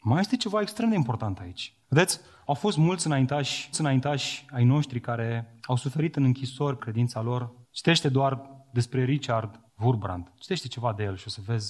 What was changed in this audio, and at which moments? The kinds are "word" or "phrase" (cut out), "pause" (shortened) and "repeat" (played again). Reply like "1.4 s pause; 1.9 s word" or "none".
1.8 s pause; 3.7 s repeat; 5.6 s pause; 6.8 s word; 7.6 s pause; 9.7 s pause